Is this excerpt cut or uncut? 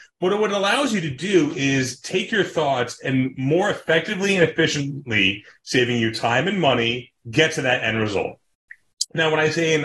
uncut